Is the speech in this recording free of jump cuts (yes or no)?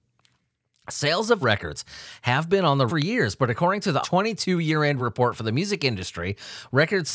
no